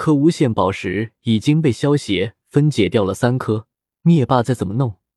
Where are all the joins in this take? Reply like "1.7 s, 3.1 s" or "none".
3.7 s